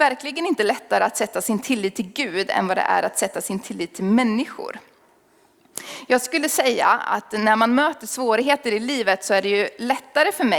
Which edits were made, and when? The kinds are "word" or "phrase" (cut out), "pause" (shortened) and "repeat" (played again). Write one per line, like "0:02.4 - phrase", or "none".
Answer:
none